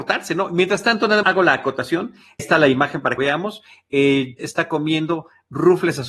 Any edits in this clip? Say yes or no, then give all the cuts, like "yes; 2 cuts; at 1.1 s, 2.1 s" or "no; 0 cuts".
yes; 4 cuts; at 1.2 s, 2.4 s, 3.2 s, 4.4 s